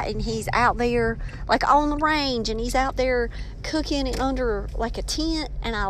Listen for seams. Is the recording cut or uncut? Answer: uncut